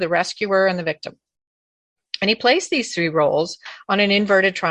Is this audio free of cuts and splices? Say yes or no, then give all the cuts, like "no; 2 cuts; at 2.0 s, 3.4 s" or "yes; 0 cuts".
yes; 0 cuts